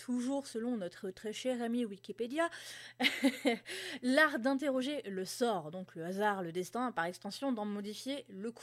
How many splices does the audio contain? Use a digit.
0